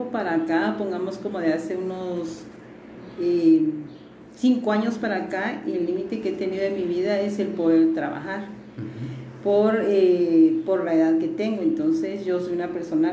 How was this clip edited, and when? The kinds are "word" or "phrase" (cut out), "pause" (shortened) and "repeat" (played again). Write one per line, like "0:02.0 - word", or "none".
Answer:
none

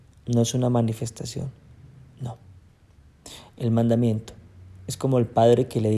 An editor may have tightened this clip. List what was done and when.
none

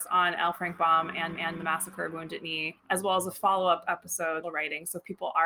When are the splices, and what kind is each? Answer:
0:01.4 - repeat
0:02.8 - pause
0:04.4 - phrase

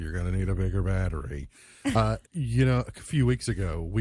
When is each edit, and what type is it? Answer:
0:02.3 - pause

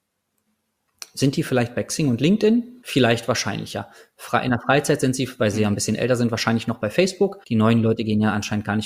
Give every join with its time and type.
0:02.8 - pause
0:07.4 - pause

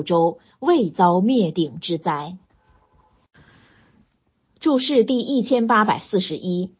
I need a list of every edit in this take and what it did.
none

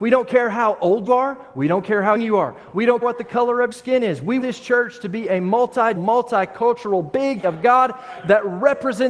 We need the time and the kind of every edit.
0:01.1 - word
0:02.2 - word
0:03.0 - word
0:03.7 - word
0:04.4 - word
0:06.0 - word
0:07.4 - word

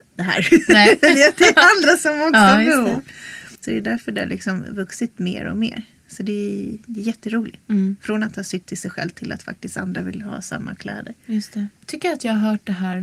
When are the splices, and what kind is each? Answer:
0:03.6 - pause
0:07.6 - pause
0:11.8 - pause

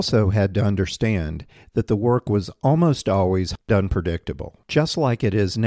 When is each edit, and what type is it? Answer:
none

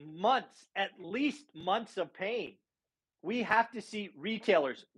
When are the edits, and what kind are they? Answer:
none

